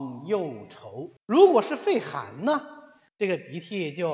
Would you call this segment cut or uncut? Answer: cut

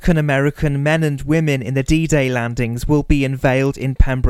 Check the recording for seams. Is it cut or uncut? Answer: uncut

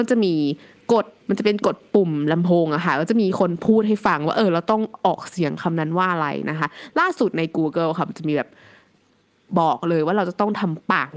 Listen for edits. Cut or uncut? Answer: cut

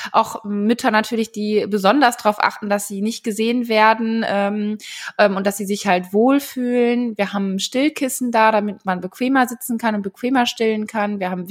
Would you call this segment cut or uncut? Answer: uncut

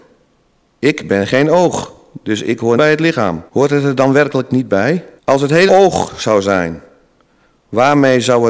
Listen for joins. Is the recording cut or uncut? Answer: cut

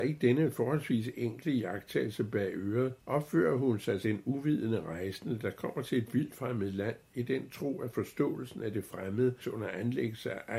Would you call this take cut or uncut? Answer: cut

